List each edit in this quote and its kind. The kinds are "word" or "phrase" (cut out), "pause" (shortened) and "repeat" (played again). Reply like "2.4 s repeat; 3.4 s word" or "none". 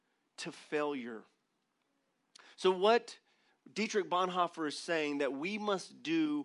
none